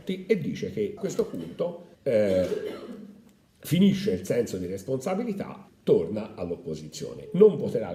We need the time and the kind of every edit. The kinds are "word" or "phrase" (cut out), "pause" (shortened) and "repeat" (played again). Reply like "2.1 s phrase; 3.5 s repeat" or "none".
1.0 s phrase; 1.9 s pause; 5.7 s word